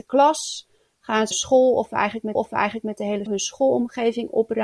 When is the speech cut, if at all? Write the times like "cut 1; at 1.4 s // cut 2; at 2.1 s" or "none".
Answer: cut 1; at 1.3 s // cut 2; at 2.3 s // cut 3; at 3.3 s